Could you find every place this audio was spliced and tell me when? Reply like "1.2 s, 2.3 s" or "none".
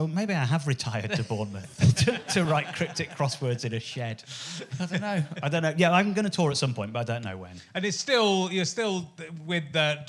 none